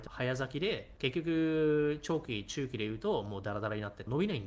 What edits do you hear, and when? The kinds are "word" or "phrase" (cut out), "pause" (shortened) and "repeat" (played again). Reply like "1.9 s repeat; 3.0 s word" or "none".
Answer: none